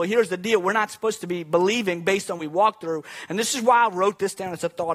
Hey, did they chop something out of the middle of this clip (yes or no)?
yes